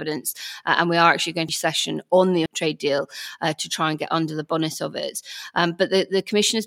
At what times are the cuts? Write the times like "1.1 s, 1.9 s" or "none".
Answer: 1.5 s, 2.5 s